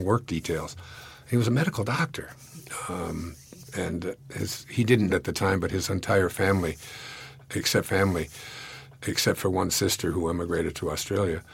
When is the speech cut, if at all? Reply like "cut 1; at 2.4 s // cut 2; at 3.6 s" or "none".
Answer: cut 1; at 5.1 s // cut 2; at 7.8 s